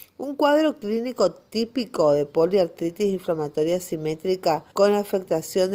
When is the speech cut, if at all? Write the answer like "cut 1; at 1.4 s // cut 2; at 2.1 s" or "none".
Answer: cut 1; at 4.7 s